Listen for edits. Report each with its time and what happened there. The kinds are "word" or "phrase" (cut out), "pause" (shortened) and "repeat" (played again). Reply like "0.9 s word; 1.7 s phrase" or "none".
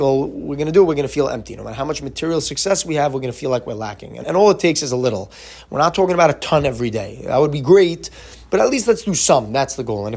4.2 s word